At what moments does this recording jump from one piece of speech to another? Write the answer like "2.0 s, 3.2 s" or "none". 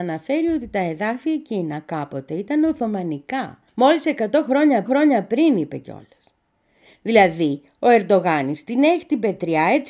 3.7 s, 4.9 s

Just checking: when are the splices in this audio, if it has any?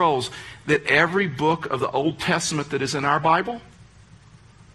none

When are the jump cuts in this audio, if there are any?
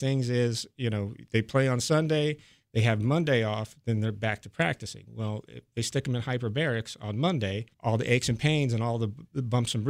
7.7 s

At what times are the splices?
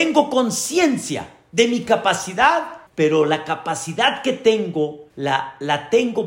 2.9 s, 5.1 s

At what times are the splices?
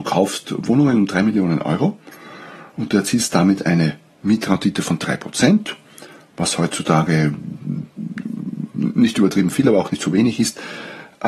none

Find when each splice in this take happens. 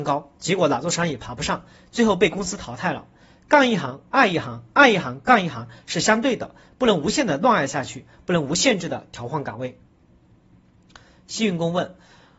none

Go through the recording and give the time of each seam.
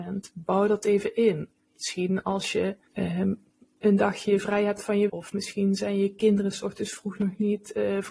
2.9 s, 5.1 s

